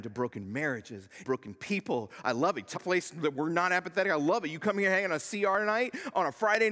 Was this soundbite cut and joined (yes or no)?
yes